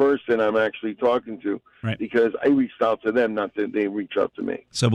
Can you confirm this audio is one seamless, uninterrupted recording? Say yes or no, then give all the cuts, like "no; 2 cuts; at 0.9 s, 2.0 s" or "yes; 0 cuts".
yes; 0 cuts